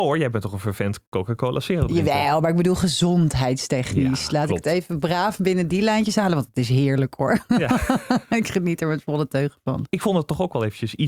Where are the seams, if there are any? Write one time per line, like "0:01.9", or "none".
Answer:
0:01.1